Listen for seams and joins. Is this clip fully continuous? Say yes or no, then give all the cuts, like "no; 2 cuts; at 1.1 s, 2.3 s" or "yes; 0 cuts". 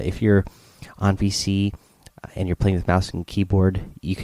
yes; 0 cuts